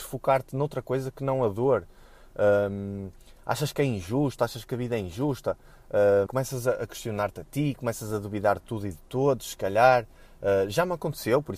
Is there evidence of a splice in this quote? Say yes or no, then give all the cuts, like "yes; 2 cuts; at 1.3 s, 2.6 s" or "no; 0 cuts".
yes; 1 cut; at 6.3 s